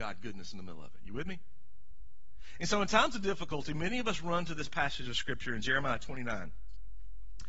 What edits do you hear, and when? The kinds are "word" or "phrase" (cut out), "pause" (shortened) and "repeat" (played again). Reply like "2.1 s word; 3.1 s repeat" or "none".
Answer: none